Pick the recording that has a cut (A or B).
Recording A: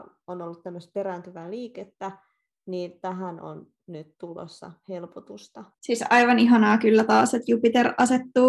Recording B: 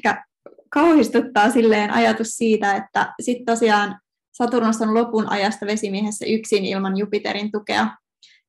A